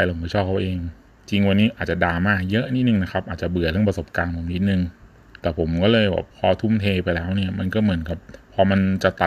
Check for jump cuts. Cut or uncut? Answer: cut